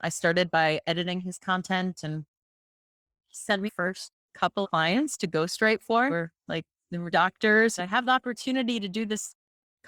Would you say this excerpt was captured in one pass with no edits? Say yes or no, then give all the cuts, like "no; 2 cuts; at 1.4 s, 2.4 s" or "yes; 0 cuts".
no; 5 cuts; at 3.7 s, 4.6 s, 6.1 s, 7.1 s, 7.8 s